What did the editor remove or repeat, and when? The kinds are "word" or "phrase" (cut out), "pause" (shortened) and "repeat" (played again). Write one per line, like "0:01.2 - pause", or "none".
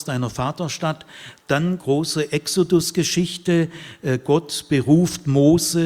0:01.8 - phrase